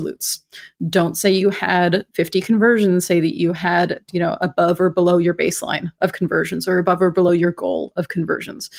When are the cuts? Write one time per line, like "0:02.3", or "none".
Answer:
none